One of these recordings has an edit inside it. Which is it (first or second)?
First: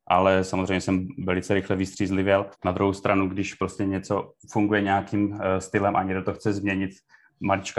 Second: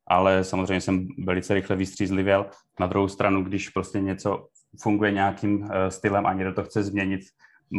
first